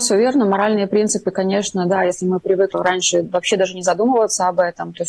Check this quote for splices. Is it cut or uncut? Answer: cut